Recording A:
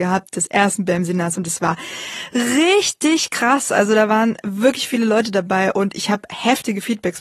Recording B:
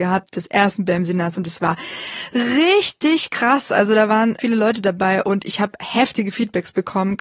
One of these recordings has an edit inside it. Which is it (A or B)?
B